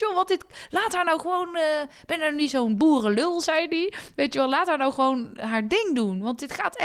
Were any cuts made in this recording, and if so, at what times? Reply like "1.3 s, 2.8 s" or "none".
none

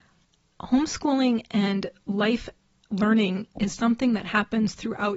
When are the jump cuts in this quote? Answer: 3.8 s

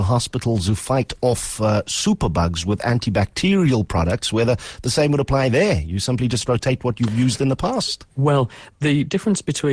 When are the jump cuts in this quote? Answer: 8.1 s

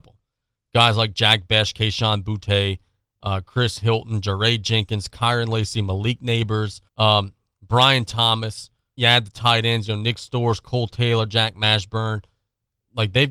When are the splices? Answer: 6.9 s, 9.0 s

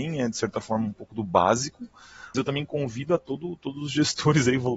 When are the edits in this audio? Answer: 2.3 s

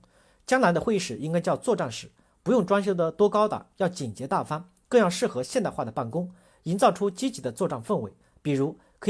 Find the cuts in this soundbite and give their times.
none

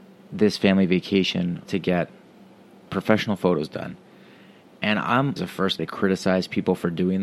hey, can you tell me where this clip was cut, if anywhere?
1.6 s, 2.9 s, 5.4 s, 5.8 s

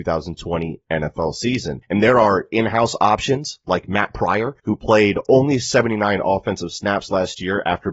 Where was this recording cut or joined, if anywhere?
4.6 s

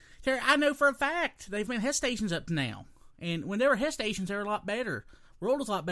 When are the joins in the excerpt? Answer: 1.7 s, 3.1 s

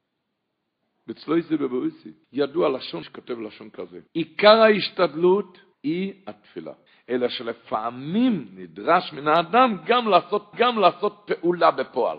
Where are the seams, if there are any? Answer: 2.2 s, 3.0 s, 4.1 s, 5.7 s, 6.9 s, 10.5 s

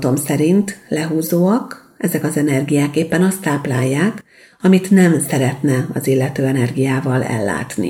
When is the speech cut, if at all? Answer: none

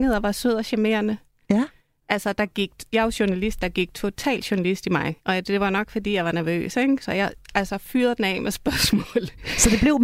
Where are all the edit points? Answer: none

